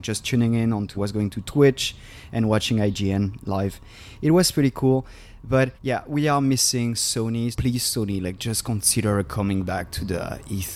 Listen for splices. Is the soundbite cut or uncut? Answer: cut